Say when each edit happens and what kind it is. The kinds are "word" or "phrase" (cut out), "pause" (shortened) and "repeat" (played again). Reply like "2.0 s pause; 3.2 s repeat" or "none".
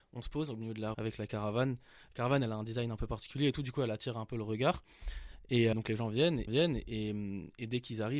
0.9 s word; 5.7 s word; 6.5 s repeat